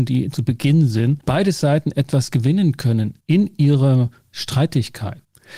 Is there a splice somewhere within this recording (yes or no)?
no